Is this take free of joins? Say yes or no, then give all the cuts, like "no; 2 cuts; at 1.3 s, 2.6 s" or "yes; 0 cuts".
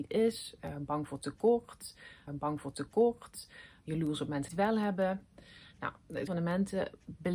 no; 3 cuts; at 2.3 s, 4.5 s, 6.3 s